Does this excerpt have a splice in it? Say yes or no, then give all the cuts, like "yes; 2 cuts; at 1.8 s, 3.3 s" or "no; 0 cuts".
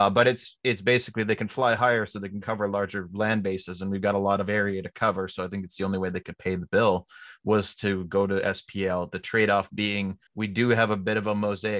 yes; 1 cut; at 10.3 s